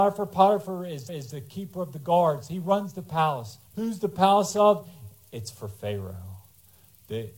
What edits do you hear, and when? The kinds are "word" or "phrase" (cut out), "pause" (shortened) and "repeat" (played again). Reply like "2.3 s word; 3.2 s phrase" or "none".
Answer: 1.1 s repeat; 3.7 s pause